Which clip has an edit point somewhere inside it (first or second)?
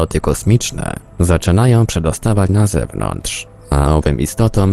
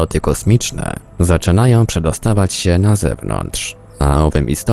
first